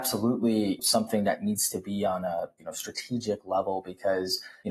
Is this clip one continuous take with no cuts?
yes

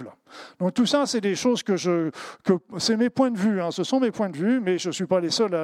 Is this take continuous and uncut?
yes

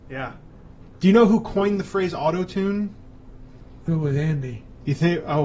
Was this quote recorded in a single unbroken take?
no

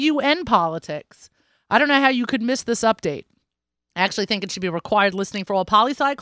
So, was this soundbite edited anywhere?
no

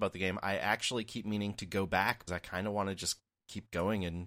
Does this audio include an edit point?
yes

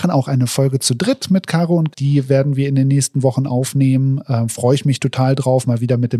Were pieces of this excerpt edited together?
yes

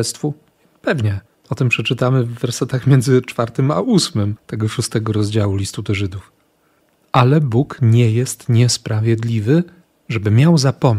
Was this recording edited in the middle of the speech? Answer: yes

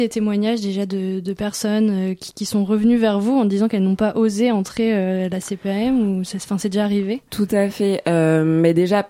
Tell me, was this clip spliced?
no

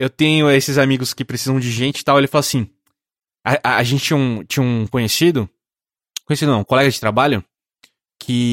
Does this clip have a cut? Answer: no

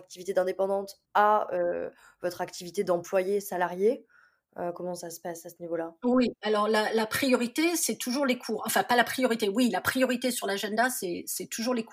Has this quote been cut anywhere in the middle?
yes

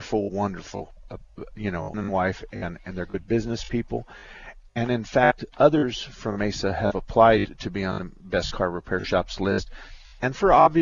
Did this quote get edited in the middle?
yes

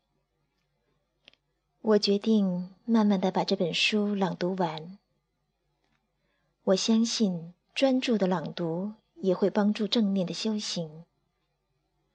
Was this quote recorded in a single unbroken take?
no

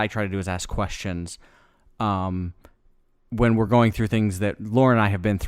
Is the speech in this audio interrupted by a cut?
no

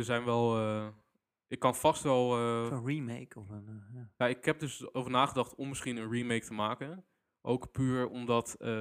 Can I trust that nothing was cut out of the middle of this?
yes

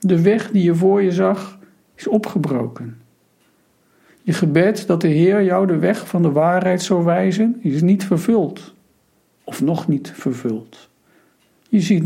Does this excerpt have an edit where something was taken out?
no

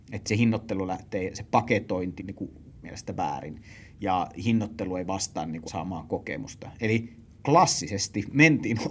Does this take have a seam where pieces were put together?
yes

